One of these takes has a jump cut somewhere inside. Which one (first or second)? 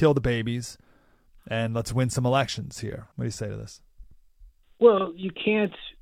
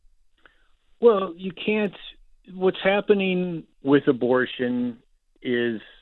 first